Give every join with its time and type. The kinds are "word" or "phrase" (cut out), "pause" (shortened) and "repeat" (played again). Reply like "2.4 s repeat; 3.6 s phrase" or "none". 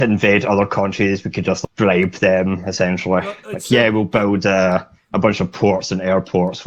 none